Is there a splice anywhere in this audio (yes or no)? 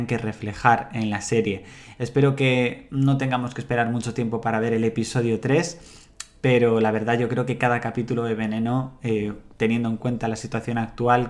no